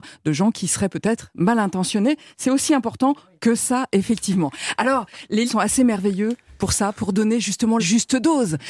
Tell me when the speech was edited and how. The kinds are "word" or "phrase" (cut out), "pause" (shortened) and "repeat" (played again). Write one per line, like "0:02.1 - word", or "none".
0:05.5 - word
0:07.8 - word

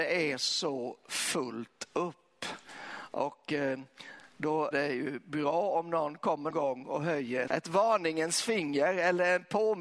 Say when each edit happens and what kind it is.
0:04.7 - word
0:06.5 - word
0:07.5 - word

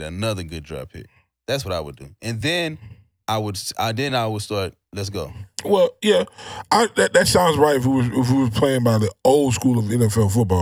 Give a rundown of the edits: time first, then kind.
none

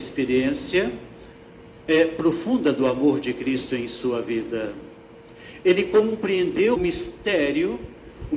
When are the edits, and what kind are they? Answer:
0:06.8 - word

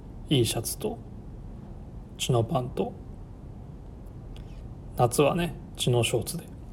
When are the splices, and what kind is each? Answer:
0:02.2 - phrase

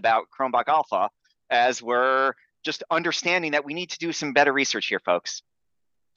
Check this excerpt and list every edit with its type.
none

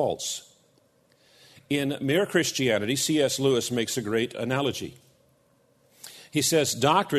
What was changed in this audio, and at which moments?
none

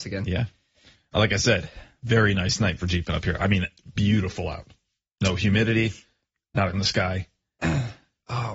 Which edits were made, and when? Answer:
0:06.7 - word

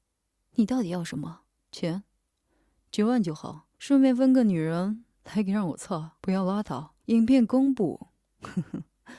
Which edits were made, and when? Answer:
0:01.5 - pause
0:03.7 - pause
0:06.2 - pause
0:07.0 - pause

